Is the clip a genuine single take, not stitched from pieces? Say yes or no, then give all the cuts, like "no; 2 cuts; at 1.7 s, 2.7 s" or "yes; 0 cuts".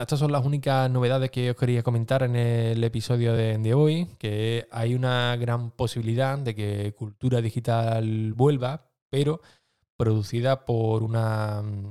yes; 0 cuts